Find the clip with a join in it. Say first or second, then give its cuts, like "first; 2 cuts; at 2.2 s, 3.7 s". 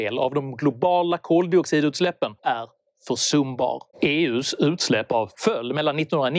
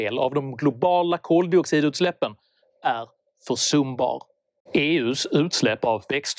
first; 3 cuts; at 2.4 s, 3.9 s, 5.3 s